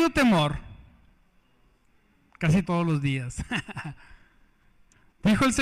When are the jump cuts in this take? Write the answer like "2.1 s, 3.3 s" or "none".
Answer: 2.6 s